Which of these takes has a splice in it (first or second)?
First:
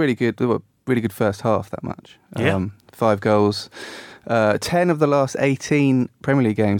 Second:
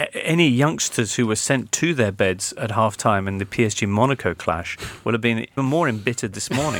second